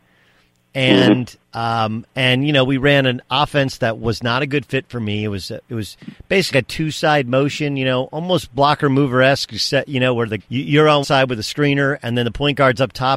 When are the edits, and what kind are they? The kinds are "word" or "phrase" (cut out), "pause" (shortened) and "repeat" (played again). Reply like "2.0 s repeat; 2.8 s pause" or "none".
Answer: 1.4 s pause; 6.5 s word; 10.4 s word; 11.0 s word